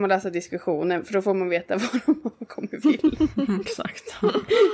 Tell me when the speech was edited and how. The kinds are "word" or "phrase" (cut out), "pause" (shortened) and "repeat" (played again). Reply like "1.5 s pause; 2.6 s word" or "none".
2.8 s word